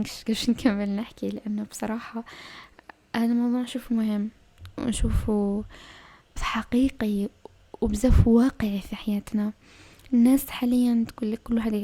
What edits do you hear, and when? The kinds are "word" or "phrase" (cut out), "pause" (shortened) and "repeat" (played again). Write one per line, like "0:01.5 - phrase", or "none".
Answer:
0:03.9 - word
0:06.4 - word